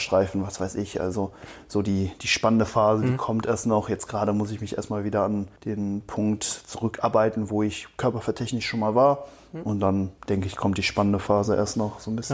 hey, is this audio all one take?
no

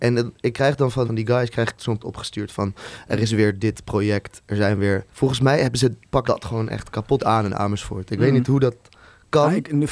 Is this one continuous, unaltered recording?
no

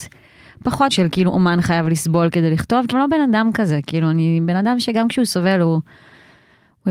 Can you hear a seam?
yes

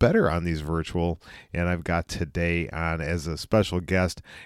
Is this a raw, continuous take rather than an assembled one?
yes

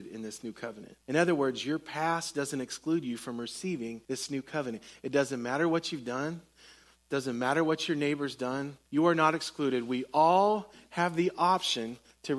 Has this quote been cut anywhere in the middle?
yes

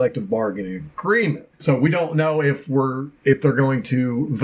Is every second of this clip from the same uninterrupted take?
no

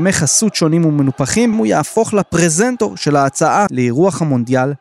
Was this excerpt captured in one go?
no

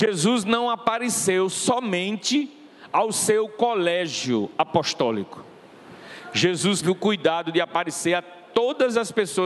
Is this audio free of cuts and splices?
no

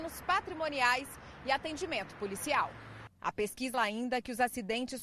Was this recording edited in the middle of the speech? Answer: yes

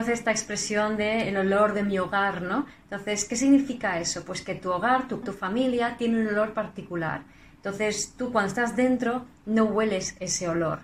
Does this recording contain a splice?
yes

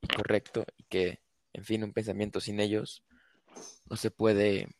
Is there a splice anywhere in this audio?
no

